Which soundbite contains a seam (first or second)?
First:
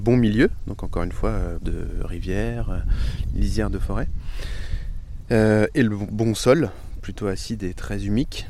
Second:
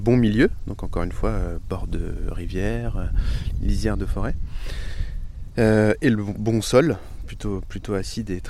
first